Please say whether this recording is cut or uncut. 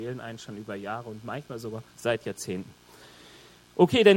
cut